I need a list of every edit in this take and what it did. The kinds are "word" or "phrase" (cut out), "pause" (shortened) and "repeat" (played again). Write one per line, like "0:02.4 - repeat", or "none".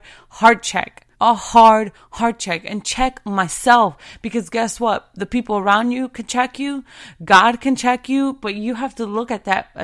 0:01.1 - pause